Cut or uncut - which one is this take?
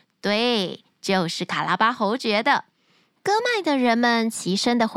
uncut